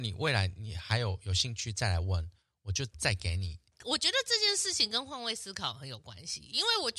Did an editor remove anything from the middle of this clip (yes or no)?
no